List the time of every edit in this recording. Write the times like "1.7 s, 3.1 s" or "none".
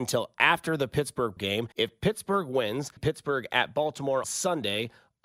1.4 s, 1.7 s, 3.0 s, 4.2 s